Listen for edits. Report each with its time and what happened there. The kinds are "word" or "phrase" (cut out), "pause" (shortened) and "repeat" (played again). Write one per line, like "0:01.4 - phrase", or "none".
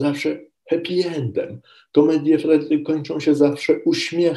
none